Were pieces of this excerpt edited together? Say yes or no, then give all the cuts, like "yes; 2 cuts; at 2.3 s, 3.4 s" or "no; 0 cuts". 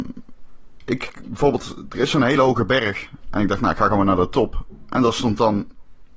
no; 0 cuts